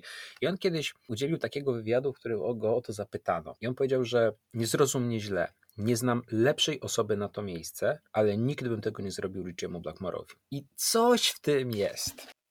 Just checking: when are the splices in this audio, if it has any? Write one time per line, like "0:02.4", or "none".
0:03.6
0:04.4
0:08.1
0:10.4